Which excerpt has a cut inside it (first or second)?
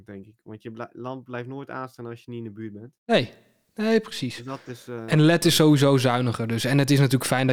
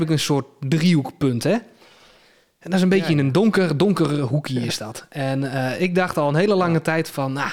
first